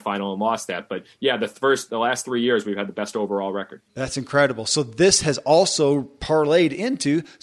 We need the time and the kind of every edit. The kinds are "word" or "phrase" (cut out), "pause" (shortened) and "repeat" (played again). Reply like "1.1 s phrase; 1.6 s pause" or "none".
3.9 s pause